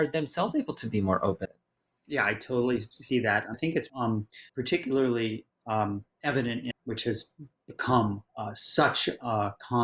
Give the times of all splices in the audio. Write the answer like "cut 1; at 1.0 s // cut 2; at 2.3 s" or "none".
cut 1; at 1.4 s // cut 2; at 3.5 s // cut 3; at 3.9 s // cut 4; at 4.5 s // cut 5; at 6.1 s // cut 6; at 6.7 s // cut 7; at 8.3 s

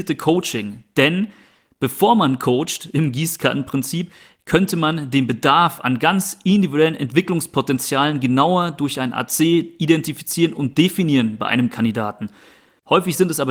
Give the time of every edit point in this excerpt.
none

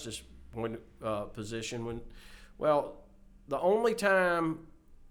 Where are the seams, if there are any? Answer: none

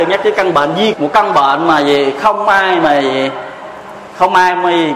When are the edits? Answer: cut 1; at 0.9 s

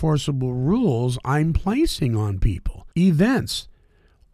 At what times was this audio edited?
cut 1; at 2.9 s

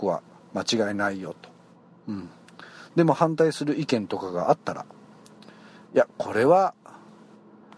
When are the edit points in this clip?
none

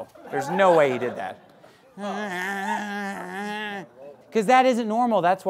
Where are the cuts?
cut 1; at 4.2 s

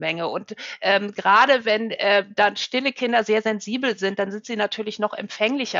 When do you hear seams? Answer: none

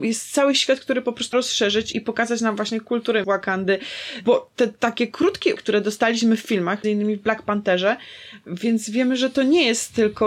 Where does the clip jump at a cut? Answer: cut 1; at 1.3 s // cut 2; at 1.9 s // cut 3; at 3.2 s // cut 4; at 5.6 s // cut 5; at 6.8 s

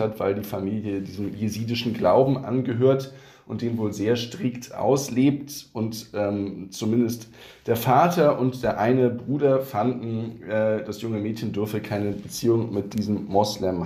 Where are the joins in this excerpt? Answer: none

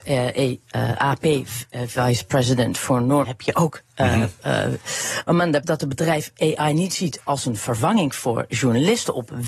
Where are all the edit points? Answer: cut 1; at 3.2 s // cut 2; at 5.6 s

